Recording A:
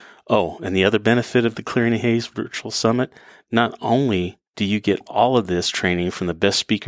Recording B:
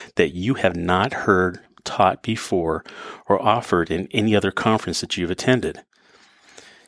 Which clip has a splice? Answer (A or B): A